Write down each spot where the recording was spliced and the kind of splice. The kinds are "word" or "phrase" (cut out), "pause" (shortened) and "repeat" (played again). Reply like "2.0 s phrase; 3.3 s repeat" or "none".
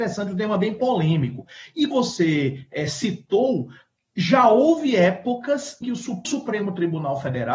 1.9 s word; 5.8 s word; 6.2 s word